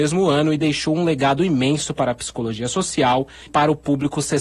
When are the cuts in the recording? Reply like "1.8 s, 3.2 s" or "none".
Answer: 3.5 s